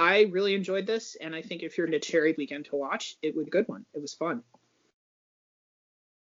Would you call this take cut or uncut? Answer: cut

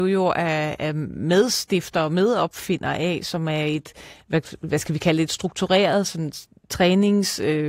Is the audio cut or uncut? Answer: uncut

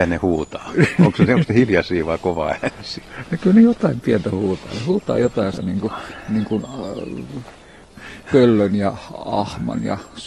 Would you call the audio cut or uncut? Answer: cut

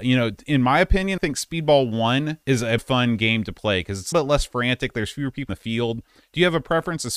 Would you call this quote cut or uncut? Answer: cut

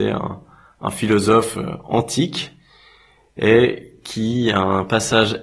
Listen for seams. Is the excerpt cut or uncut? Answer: uncut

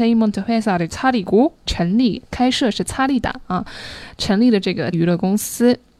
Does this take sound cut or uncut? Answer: cut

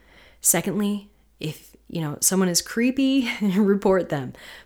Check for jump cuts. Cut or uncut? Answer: uncut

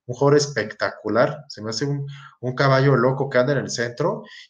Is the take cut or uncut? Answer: cut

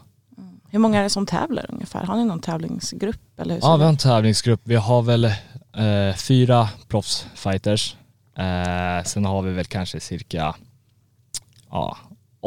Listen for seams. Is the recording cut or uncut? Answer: uncut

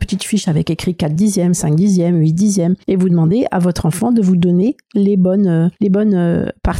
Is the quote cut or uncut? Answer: cut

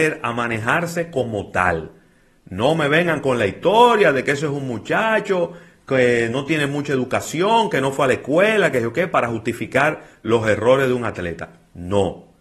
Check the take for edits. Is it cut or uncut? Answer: uncut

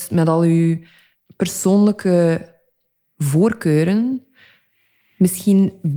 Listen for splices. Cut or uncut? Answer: uncut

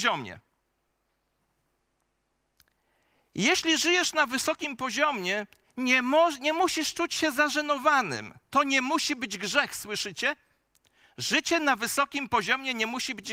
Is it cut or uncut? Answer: cut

